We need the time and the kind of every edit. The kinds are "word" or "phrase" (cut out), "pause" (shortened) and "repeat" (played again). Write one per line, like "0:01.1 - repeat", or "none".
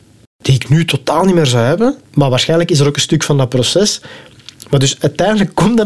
0:02.0 - pause

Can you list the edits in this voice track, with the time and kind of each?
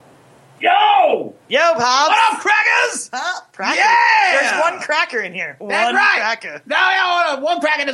none

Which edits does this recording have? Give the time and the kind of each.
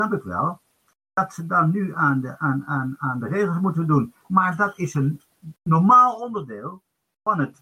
0:03.0 - word

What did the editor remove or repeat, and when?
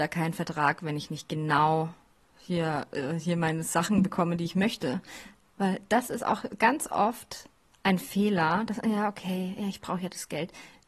none

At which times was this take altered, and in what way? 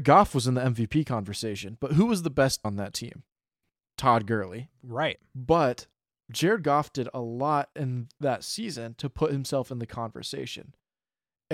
0:02.6 - word

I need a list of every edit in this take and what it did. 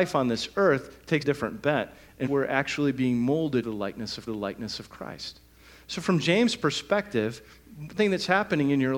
0:01.2 - phrase
0:02.3 - word
0:03.6 - word
0:04.3 - repeat
0:08.0 - phrase

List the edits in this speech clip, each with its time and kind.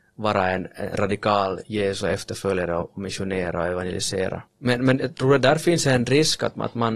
0:04.5 - pause

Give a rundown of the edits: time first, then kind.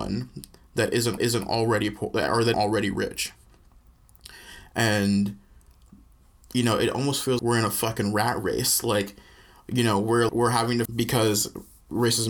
0:01.2 - repeat
0:02.5 - word
0:07.4 - word
0:10.3 - word
0:10.9 - phrase

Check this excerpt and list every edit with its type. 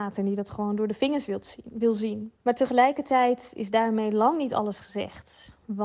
0:02.4 - pause

